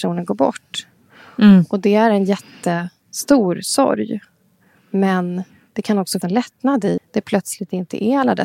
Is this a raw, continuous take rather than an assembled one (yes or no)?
no